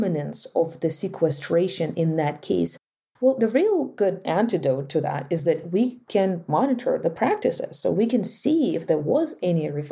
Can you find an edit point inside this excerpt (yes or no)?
no